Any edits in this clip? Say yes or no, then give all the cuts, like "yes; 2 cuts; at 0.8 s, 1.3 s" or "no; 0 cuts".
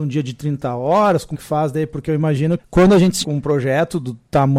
yes; 3 cuts; at 1.3 s, 2.6 s, 3.2 s